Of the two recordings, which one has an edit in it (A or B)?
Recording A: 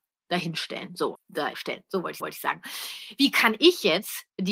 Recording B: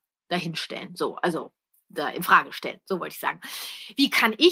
A